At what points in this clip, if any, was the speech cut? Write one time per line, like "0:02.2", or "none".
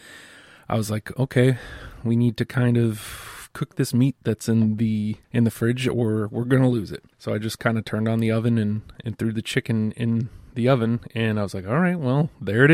0:05.2
0:07.1